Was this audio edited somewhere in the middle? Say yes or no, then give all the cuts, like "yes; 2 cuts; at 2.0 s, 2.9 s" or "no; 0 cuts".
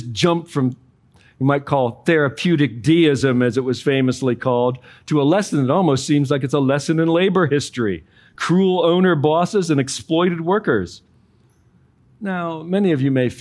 no; 0 cuts